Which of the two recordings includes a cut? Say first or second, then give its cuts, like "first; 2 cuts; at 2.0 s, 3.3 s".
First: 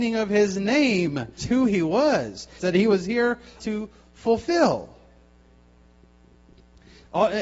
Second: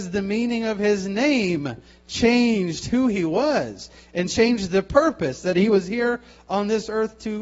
first; 3 cuts; at 1.4 s, 2.6 s, 3.6 s